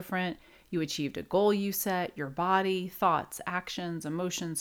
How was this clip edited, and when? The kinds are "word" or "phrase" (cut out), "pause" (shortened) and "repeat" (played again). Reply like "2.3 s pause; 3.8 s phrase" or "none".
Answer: none

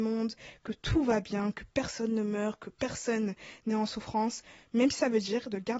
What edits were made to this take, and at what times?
none

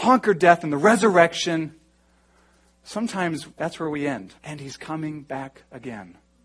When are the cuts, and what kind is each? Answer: 3.5 s pause; 4.4 s pause

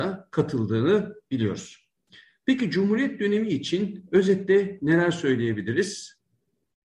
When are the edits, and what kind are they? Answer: none

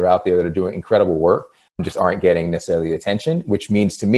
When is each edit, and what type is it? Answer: none

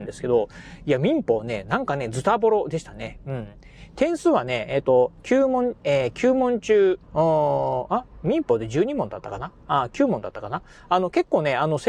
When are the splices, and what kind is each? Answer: 7.0 s pause

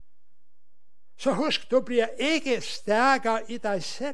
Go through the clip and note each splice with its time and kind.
none

